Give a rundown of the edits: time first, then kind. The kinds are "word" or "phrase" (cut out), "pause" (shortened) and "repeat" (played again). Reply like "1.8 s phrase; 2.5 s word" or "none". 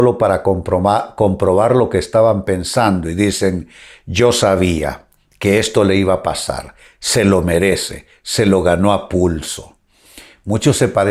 none